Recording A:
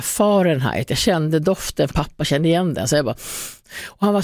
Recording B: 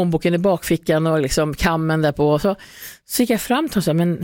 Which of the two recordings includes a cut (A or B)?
A